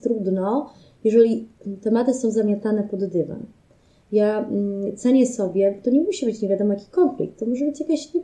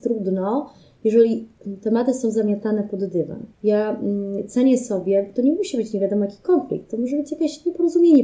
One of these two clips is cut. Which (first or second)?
second